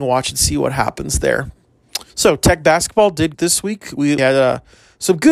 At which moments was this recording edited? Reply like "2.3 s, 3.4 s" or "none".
2.1 s, 3.3 s, 4.2 s